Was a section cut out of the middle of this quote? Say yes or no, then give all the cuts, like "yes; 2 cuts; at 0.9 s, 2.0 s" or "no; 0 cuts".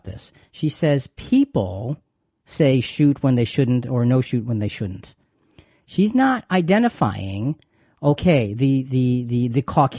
no; 0 cuts